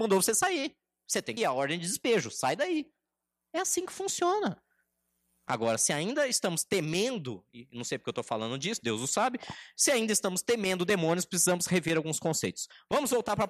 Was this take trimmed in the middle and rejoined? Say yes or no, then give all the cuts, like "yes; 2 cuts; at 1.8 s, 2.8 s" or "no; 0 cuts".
yes; 1 cut; at 1.4 s